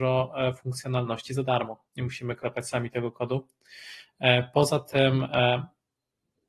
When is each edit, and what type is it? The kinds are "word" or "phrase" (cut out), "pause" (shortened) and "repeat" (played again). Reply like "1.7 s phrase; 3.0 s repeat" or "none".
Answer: none